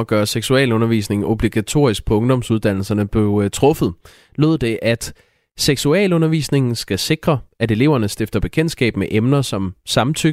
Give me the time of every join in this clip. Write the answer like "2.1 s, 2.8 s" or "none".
none